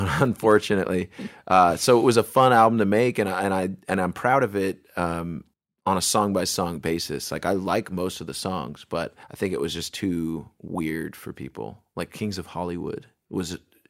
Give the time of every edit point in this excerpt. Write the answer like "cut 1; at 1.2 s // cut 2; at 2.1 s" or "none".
cut 1; at 5.5 s // cut 2; at 9.2 s